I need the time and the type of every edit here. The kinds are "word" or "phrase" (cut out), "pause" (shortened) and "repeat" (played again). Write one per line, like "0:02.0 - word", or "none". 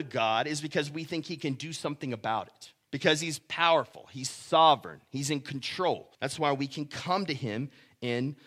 0:02.8 - pause
0:06.1 - pause